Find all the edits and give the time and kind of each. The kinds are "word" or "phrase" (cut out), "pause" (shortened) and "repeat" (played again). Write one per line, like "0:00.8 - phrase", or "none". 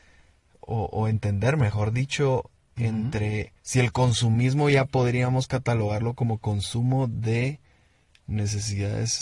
0:03.6 - pause